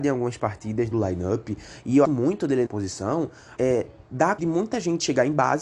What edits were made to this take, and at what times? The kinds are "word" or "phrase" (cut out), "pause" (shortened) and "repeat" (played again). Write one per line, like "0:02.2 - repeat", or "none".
0:00.9 - phrase
0:02.0 - phrase
0:02.7 - word
0:03.6 - phrase
0:04.4 - word